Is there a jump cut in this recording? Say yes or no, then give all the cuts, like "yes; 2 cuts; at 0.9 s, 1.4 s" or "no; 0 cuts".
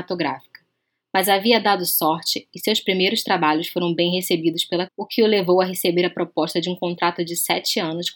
yes; 1 cut; at 4.9 s